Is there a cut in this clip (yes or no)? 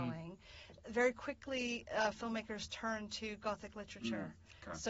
no